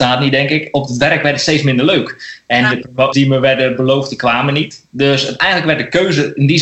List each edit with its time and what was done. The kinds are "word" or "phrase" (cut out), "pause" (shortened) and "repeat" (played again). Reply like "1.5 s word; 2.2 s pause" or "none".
3.1 s phrase